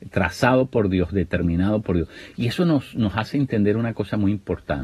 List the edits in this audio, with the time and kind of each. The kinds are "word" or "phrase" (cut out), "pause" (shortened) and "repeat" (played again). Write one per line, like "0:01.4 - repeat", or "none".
none